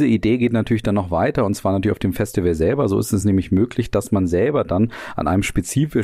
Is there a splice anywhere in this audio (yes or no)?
no